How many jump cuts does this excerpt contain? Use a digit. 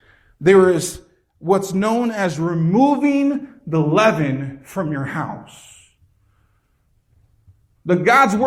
0